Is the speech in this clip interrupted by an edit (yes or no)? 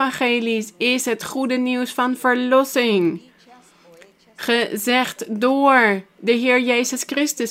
no